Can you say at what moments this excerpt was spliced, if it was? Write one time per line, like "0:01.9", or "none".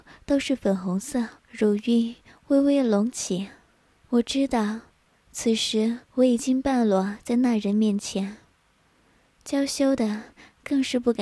0:01.4
0:03.7
0:06.0